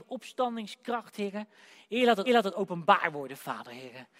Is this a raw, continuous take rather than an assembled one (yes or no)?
no